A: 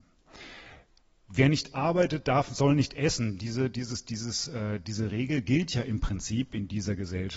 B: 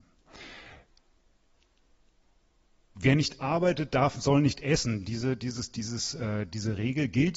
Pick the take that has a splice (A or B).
A